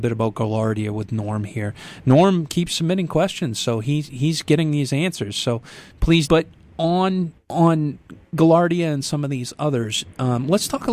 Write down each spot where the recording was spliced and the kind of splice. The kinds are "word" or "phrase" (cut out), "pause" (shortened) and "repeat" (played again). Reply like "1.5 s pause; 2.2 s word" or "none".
6.3 s phrase; 7.4 s pause

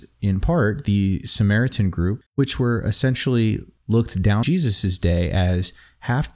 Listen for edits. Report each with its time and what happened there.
2.3 s pause; 4.4 s phrase

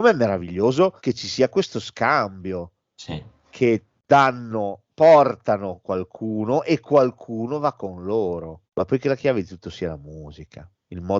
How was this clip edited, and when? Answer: 1.0 s pause; 4.0 s pause; 8.7 s pause

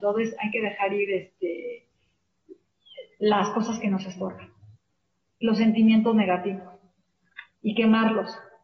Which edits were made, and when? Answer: none

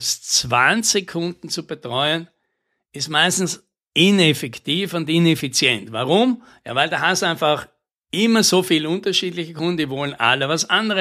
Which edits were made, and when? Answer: none

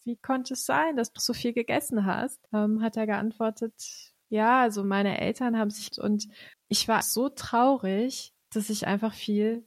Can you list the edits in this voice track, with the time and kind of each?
1.2 s word; 2.5 s pause; 4.2 s pause; 5.9 s word; 6.5 s pause; 7.0 s word

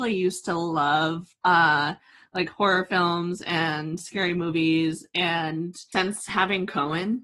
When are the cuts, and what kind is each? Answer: none

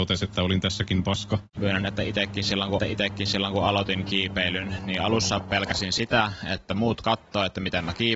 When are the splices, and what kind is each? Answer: 1.5 s pause; 2.8 s repeat

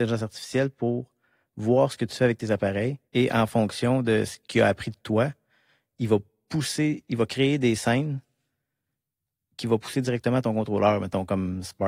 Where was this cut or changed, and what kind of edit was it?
3.0 s pause

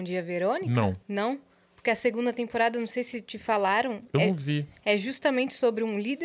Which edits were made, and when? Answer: 1.0 s pause

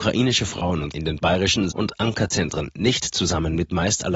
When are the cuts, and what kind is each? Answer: 0.9 s word; 1.7 s word

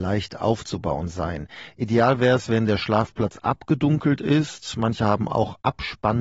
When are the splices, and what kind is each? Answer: none

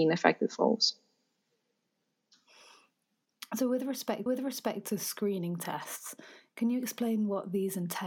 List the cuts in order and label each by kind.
4.3 s repeat

